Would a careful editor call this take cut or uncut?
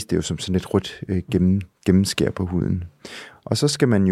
uncut